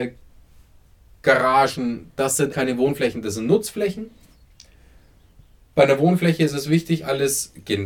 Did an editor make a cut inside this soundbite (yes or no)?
yes